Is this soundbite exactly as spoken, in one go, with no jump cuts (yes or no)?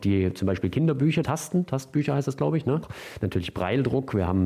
no